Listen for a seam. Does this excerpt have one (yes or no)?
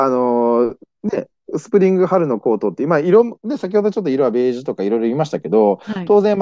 no